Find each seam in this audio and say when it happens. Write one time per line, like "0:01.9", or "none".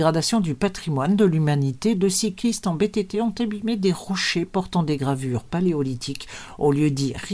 none